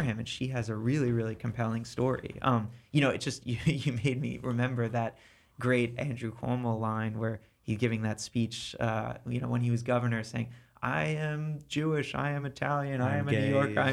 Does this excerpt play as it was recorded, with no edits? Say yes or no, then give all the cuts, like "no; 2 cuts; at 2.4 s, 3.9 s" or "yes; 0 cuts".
yes; 0 cuts